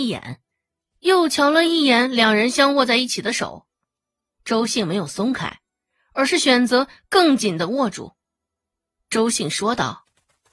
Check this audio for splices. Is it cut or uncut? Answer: uncut